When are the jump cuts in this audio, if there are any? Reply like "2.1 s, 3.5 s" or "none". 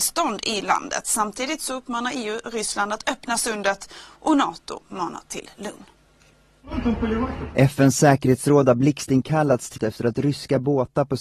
9.8 s